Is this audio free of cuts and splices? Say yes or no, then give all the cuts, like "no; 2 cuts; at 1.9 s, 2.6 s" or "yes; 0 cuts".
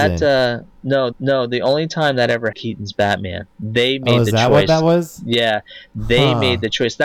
no; 2 cuts; at 1.1 s, 2.5 s